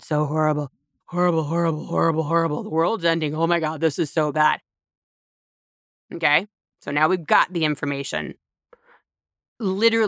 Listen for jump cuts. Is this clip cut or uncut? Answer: uncut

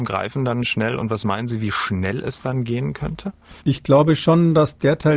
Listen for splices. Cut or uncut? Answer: cut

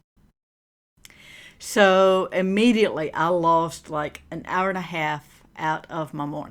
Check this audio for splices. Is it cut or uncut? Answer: uncut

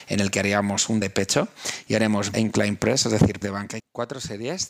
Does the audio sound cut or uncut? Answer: cut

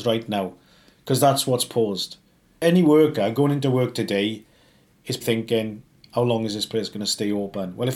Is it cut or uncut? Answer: cut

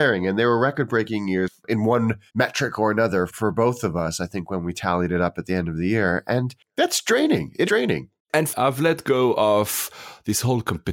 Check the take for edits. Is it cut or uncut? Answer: cut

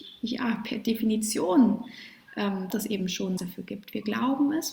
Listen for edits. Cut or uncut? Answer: cut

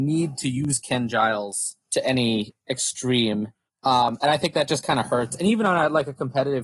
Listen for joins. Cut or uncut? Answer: cut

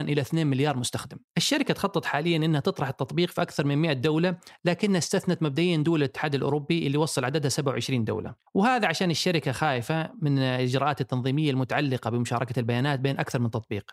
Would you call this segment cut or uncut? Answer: cut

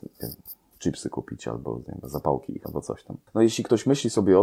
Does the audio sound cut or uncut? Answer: cut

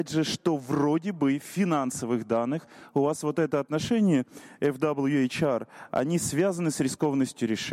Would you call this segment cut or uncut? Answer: uncut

